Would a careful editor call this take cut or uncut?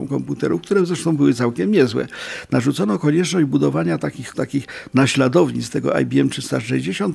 cut